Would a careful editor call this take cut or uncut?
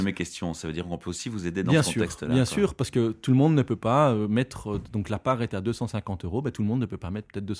uncut